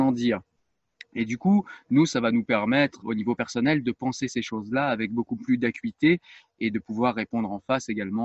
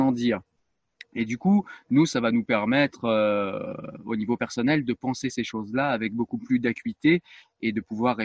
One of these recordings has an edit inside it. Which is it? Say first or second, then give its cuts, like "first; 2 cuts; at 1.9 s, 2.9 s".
first; 1 cut; at 3.0 s